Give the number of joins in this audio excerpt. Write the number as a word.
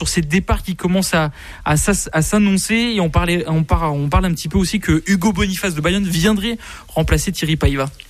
zero